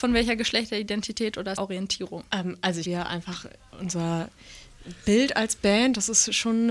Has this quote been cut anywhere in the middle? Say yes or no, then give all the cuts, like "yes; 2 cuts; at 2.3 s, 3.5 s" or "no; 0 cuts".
yes; 3 cuts; at 1.5 s, 2.3 s, 2.8 s